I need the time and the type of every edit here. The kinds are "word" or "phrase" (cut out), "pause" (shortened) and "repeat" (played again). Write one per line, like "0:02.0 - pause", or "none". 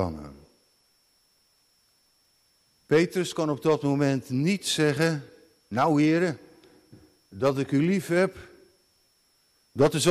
none